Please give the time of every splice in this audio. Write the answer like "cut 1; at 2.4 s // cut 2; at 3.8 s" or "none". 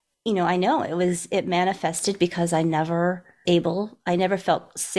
cut 1; at 3.5 s